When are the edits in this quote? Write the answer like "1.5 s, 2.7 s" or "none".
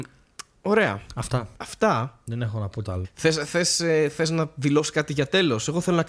1.5 s, 2.8 s

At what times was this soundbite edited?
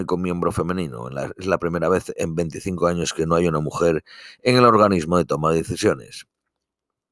none

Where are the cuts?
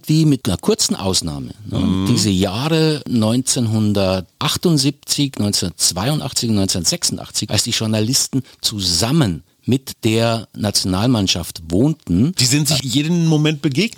none

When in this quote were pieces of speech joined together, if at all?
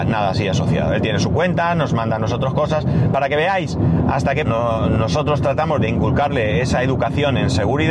4.5 s, 5.8 s

